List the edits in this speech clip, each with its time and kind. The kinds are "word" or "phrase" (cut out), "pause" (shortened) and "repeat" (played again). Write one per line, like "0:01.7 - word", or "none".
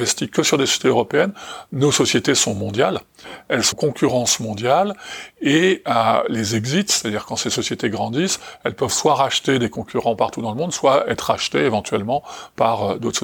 0:03.7 - word